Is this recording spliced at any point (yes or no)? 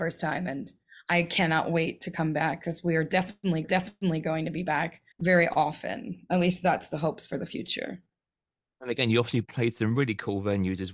yes